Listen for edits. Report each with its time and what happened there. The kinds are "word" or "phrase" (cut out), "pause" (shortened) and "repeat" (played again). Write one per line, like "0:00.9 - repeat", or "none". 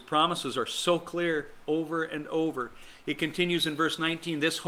none